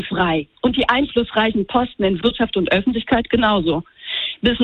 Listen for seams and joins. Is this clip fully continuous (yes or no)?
yes